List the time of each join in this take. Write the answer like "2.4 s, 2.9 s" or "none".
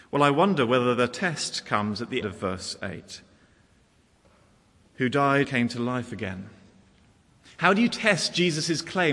2.2 s, 5.4 s